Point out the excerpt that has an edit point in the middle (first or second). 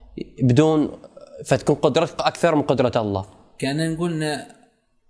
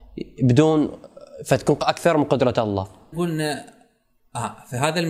second